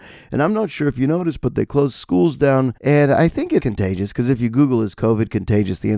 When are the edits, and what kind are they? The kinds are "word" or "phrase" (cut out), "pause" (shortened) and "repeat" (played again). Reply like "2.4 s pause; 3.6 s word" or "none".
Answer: 2.8 s pause; 3.6 s word